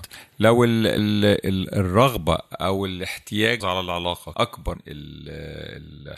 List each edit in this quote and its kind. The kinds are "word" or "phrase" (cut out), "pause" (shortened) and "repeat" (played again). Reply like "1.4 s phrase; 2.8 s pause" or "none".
1.0 s word; 3.6 s word; 4.3 s word; 4.7 s word